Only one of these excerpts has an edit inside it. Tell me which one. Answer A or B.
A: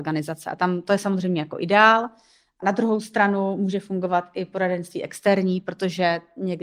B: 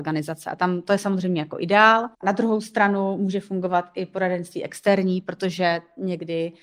B